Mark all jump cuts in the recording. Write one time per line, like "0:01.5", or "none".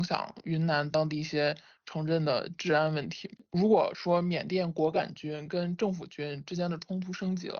none